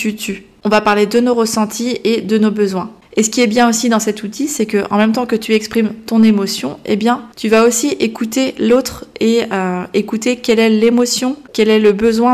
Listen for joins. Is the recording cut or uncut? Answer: cut